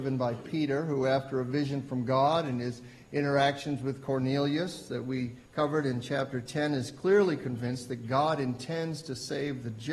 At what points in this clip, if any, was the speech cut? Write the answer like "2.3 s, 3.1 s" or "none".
5.5 s